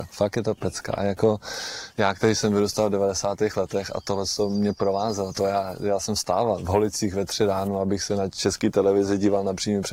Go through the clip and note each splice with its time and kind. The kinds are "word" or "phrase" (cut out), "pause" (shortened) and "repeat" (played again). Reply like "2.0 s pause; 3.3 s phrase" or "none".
none